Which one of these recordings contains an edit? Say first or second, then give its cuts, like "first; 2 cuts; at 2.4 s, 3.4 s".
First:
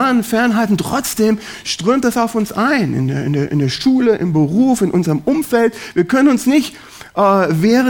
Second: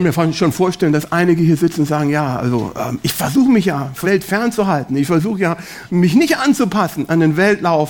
second; 2 cuts; at 4.0 s, 5.9 s